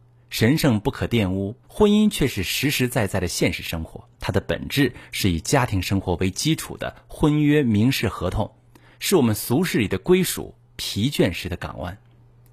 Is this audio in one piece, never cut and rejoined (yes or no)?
no